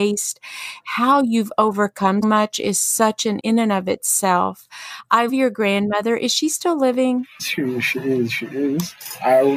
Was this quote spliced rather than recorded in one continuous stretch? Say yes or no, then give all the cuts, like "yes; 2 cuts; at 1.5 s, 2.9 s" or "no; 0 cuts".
yes; 4 cuts; at 2.2 s, 3.4 s, 5.3 s, 7.4 s